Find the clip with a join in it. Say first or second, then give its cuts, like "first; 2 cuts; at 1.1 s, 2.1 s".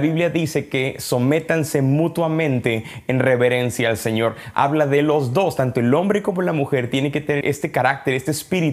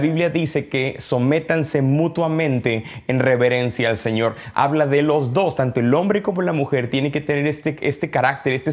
first; 1 cut; at 7.4 s